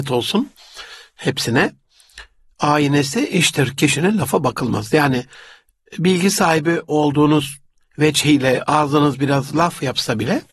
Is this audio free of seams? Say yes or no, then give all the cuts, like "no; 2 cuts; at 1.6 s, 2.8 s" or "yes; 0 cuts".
yes; 0 cuts